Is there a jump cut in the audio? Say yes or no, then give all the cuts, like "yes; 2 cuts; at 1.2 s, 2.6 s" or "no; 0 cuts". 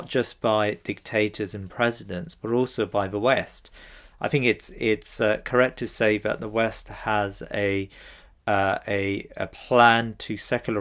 no; 0 cuts